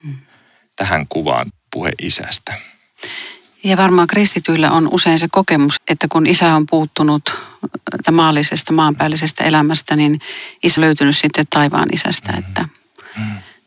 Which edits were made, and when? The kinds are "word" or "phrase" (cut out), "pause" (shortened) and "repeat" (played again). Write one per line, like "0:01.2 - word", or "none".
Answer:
0:01.5 - word
0:05.8 - word
0:08.0 - word
0:10.8 - word